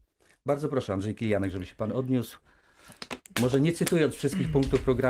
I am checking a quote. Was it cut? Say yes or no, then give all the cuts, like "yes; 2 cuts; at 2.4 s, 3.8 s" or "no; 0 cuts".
no; 0 cuts